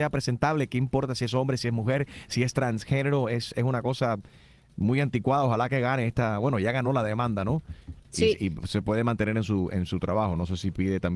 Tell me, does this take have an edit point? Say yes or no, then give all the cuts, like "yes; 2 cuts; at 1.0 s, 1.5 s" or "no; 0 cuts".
no; 0 cuts